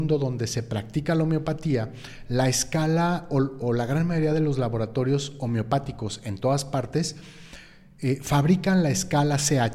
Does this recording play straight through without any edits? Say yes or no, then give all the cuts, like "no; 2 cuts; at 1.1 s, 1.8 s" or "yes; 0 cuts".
yes; 0 cuts